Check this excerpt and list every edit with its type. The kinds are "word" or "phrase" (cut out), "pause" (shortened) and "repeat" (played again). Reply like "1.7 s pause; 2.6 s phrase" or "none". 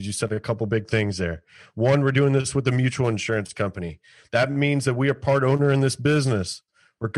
none